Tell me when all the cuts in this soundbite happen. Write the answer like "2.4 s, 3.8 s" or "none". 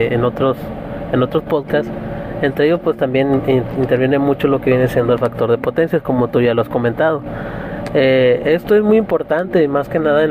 none